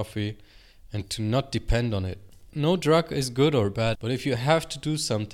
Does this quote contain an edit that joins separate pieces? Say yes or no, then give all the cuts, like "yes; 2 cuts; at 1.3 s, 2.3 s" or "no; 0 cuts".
yes; 2 cuts; at 2.5 s, 3.9 s